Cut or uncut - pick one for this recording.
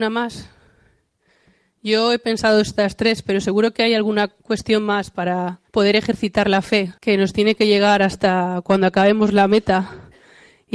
cut